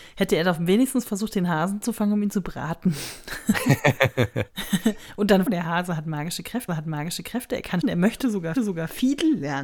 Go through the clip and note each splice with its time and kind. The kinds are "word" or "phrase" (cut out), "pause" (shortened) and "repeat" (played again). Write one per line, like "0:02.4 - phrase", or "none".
0:05.5 - phrase
0:06.7 - repeat
0:07.8 - word
0:08.6 - repeat